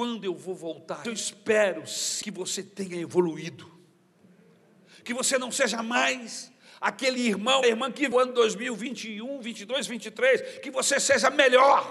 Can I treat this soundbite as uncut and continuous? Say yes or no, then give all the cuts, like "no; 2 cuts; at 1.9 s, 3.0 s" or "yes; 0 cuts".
no; 4 cuts; at 1.0 s, 2.2 s, 7.6 s, 8.1 s